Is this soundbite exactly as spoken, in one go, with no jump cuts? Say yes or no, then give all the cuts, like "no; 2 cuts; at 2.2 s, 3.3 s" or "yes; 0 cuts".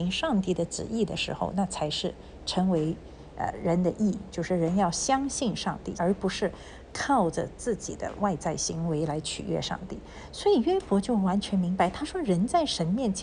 no; 1 cut; at 5.9 s